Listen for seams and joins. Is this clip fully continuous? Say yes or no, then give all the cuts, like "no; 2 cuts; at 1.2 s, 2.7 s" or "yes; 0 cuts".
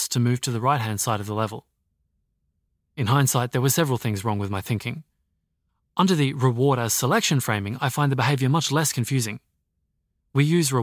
yes; 0 cuts